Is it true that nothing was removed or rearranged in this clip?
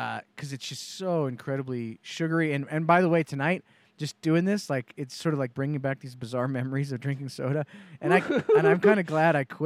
yes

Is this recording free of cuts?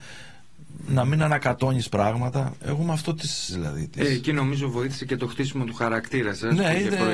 no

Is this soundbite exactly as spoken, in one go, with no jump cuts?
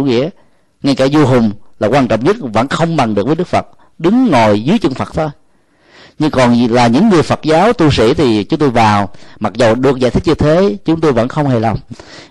yes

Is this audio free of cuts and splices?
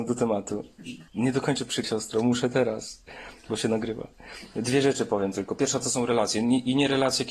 no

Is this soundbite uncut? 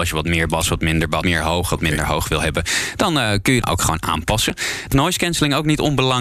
no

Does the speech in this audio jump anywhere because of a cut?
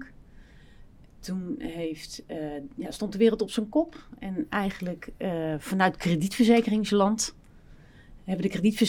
no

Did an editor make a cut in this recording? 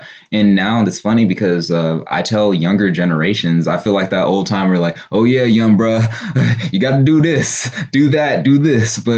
no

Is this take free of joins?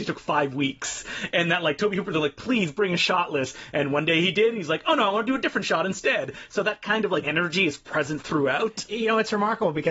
no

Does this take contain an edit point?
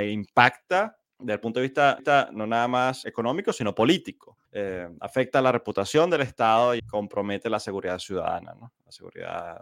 yes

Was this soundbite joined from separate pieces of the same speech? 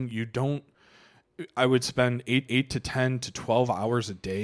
yes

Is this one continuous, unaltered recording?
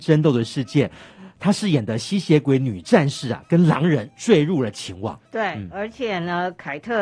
no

